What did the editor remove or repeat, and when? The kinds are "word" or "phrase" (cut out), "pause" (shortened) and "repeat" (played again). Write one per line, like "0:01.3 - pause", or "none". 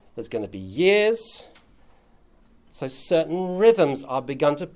none